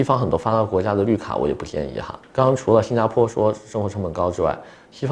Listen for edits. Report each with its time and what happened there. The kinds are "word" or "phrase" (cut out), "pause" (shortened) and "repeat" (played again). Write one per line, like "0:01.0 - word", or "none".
0:02.2 - pause